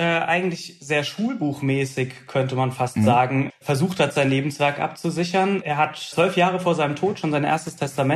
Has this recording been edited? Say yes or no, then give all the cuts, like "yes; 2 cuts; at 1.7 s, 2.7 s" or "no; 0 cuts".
yes; 2 cuts; at 3.5 s, 6.1 s